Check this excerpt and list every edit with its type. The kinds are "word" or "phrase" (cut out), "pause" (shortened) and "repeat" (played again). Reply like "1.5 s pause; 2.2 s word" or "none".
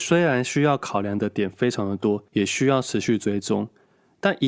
2.3 s pause